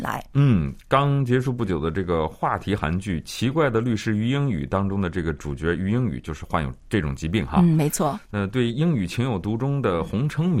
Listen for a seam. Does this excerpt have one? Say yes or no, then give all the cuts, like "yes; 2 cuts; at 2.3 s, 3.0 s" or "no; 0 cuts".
no; 0 cuts